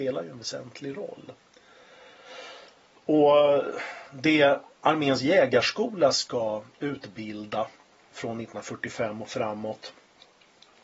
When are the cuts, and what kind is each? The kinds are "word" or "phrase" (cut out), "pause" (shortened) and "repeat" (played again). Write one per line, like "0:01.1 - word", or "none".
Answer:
0:08.1 - word